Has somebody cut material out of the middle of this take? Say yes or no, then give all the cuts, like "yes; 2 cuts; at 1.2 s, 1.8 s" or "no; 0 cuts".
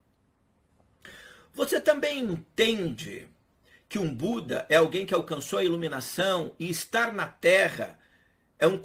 no; 0 cuts